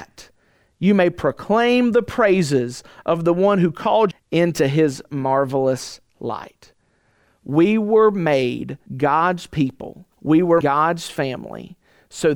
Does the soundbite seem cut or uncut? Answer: cut